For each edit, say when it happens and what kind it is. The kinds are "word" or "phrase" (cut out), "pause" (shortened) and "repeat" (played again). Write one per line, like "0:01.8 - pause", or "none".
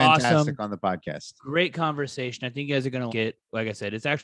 0:03.1 - word

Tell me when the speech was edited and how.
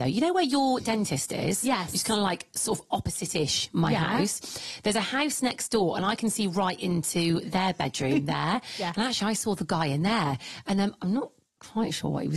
none

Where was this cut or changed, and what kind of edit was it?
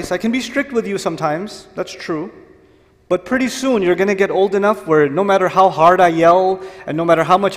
none

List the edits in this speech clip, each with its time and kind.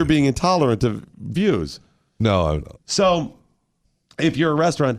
0:01.3 - word
0:02.6 - word

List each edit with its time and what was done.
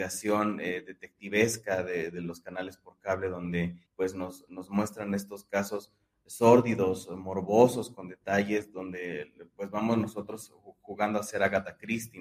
0:03.9 - pause

